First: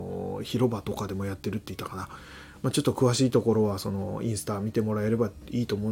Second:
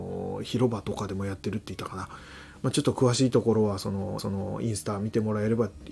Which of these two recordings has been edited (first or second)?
second